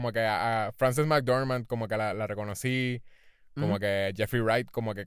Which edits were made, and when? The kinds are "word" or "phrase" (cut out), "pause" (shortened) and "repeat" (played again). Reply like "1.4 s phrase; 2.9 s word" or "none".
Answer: none